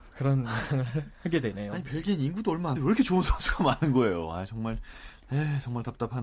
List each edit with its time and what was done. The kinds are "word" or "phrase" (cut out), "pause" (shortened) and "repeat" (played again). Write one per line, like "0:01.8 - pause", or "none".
0:02.7 - word

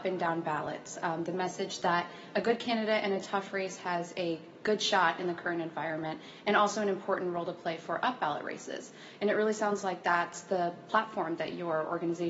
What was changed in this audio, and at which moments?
none

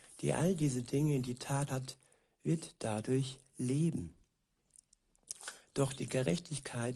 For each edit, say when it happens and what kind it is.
0:01.7 - word

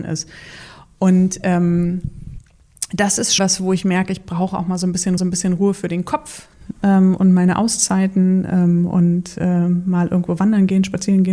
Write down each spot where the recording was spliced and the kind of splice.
0:03.4 - word
0:05.2 - repeat

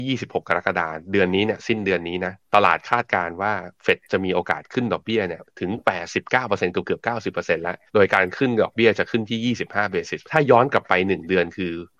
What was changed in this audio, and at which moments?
0:02.4 - pause
0:07.9 - pause
0:10.2 - word

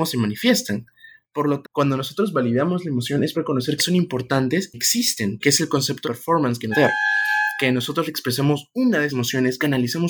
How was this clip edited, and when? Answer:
0:01.6 - word
0:03.3 - word
0:03.8 - word
0:04.7 - word
0:05.4 - word
0:06.0 - word
0:06.7 - word
0:08.1 - word
0:09.1 - word

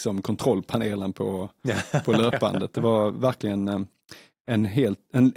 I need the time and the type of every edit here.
none

